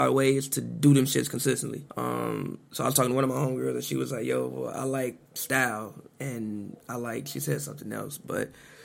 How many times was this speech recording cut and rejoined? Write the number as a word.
two